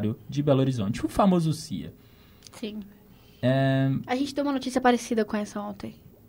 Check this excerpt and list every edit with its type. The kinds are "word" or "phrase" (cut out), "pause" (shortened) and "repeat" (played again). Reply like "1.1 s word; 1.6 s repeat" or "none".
none